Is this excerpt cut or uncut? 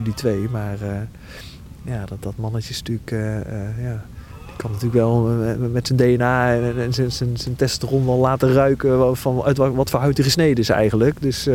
uncut